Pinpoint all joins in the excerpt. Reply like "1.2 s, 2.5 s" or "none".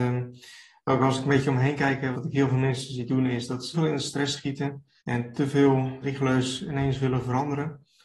2.1 s, 3.7 s, 5.0 s, 6.0 s